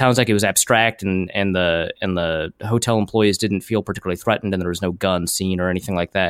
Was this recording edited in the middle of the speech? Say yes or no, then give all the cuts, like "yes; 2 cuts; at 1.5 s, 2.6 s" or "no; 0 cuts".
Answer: no; 0 cuts